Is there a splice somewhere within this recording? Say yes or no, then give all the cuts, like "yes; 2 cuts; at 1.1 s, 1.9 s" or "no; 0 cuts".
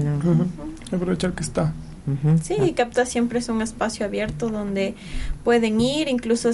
no; 0 cuts